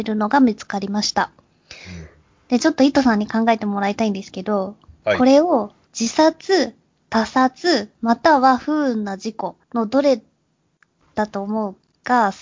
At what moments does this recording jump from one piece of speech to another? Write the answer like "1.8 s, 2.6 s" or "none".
7.9 s, 9.6 s